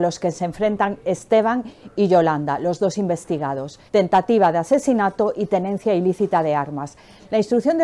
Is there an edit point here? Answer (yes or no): yes